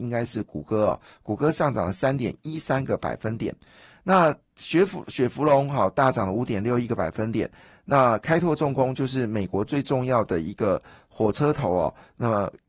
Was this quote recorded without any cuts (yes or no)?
yes